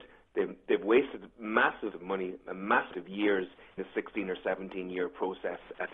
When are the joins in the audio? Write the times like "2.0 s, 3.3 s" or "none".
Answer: 1.9 s, 2.9 s, 3.8 s